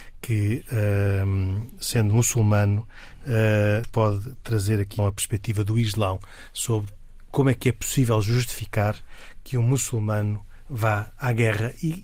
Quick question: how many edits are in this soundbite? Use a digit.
2